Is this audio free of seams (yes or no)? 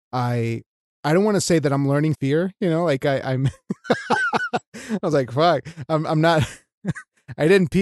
no